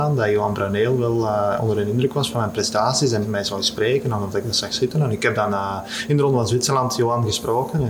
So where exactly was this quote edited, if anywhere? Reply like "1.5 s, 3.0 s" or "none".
3.2 s